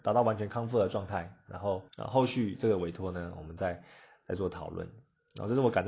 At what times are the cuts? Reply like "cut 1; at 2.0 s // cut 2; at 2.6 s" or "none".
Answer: cut 1; at 1.9 s